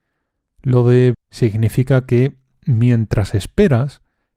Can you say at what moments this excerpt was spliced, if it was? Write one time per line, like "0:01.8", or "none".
0:01.1